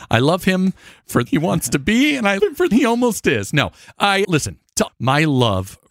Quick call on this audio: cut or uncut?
cut